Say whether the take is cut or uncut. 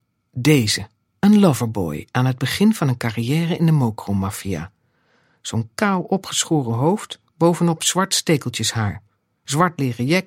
cut